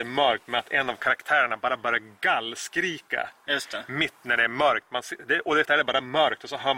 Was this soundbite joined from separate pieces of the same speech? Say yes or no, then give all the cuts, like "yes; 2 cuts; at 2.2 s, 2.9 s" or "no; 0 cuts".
yes; 1 cut; at 5.6 s